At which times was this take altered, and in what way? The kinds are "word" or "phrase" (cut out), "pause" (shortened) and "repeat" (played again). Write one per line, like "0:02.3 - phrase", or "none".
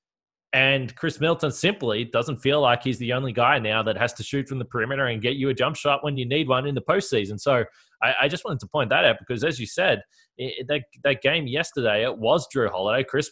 none